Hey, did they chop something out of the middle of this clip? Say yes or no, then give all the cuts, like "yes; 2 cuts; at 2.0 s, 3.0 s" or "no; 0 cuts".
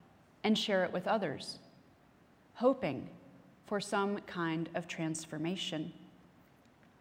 no; 0 cuts